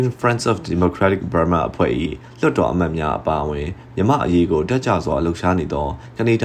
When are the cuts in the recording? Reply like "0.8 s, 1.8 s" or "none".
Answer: none